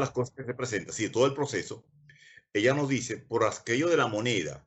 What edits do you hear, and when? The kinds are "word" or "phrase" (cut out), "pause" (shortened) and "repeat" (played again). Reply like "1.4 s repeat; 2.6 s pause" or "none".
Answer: none